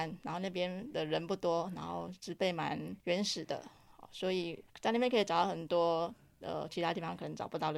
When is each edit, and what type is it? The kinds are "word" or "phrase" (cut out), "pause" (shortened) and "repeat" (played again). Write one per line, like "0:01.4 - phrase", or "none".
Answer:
0:03.0 - pause
0:04.7 - pause